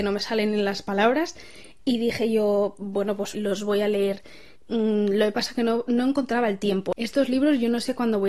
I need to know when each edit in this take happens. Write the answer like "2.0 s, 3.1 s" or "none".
3.3 s, 4.5 s